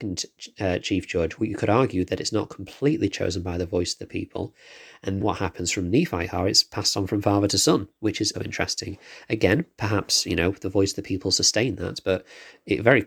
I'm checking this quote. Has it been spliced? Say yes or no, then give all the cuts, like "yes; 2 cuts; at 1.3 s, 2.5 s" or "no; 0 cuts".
yes; 3 cuts; at 1.4 s, 5.2 s, 8.3 s